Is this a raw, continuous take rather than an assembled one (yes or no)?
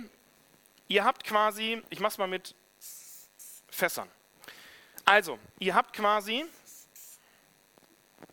no